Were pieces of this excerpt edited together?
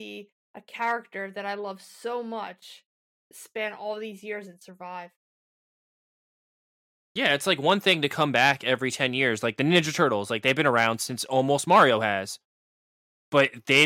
no; 0 cuts

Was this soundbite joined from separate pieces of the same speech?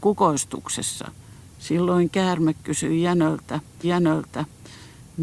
yes; 2 cuts; at 1.2 s, 3.8 s

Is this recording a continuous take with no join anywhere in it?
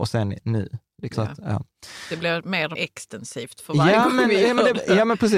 no; 2 cuts; at 1.1 s, 2.7 s

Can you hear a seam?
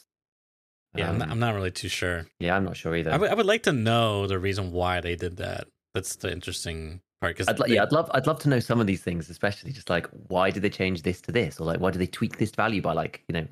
yes; 3 cuts; at 2.3 s, 6.2 s, 7.1 s

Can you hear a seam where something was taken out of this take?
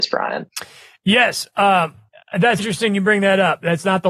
yes; 1 cut; at 2.6 s

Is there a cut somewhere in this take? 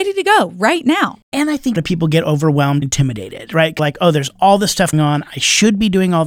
yes; 4 cuts; at 1.8 s, 2.8 s, 3.8 s, 4.9 s

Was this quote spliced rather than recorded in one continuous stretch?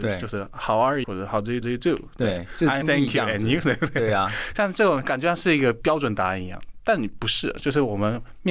yes; 3 cuts; at 1.0 s, 1.6 s, 2.8 s

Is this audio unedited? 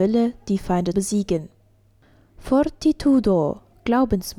no; 1 cut; at 0.9 s

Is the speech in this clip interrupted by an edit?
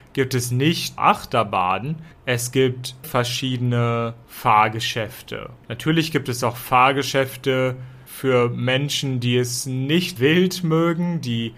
yes; 3 cuts; at 1.0 s, 3.0 s, 10.2 s

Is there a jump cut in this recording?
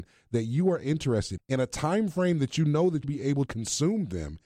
yes; 3 cuts; at 1.4 s, 3.0 s, 3.5 s

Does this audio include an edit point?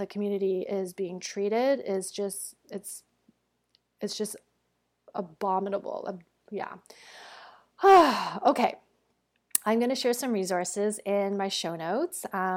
no; 0 cuts

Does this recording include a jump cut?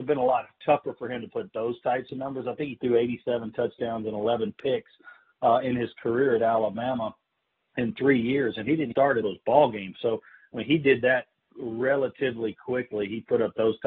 yes; 2 cuts; at 8.9 s, 9.2 s

